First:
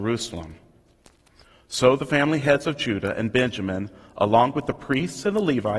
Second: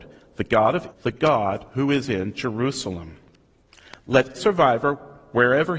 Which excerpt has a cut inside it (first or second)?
second